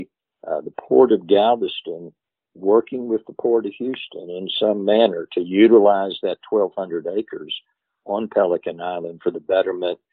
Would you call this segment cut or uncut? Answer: uncut